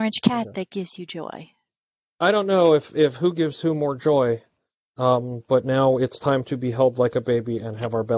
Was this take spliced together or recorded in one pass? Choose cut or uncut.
uncut